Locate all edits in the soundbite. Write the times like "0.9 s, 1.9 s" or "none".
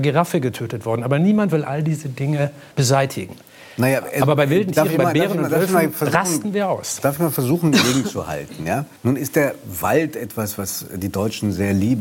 2.7 s, 9.0 s